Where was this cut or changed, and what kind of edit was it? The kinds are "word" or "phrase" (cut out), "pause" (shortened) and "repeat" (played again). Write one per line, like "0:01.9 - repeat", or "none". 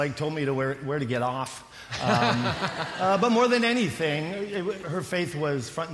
0:04.8 - word